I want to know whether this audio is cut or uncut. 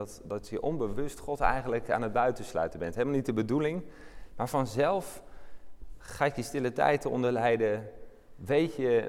uncut